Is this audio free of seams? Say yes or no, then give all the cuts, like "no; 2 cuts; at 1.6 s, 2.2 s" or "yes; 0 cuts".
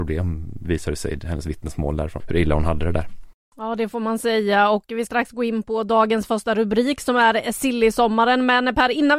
no; 2 cuts; at 2.2 s, 5.1 s